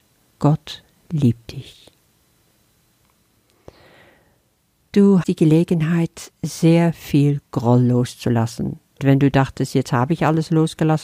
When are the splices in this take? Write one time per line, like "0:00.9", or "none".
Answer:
0:05.2
0:09.0